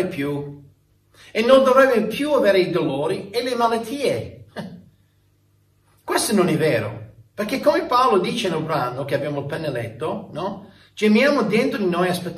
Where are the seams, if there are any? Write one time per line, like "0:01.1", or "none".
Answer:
none